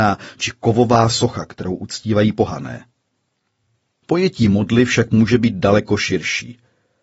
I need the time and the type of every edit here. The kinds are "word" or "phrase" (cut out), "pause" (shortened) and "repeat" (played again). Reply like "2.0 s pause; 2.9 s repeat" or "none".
none